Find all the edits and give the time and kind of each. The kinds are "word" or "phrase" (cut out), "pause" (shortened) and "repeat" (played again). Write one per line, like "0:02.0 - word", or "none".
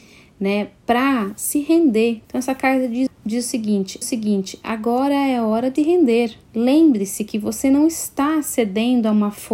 0:02.2 - pause
0:03.1 - word
0:04.0 - repeat
0:05.8 - word
0:06.4 - pause